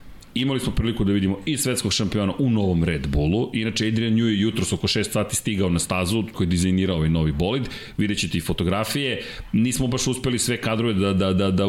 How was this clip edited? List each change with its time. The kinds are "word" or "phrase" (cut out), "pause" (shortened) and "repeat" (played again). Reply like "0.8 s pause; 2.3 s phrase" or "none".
6.3 s word